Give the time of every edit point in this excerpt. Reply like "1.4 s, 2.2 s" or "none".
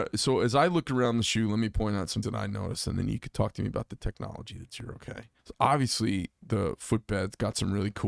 2.2 s, 5.4 s